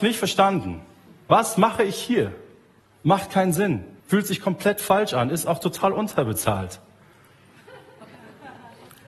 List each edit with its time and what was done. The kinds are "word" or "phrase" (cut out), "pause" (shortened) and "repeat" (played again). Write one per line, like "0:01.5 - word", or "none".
0:01.1 - pause
0:02.8 - pause
0:04.0 - pause